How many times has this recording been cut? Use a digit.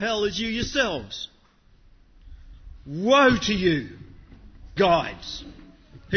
1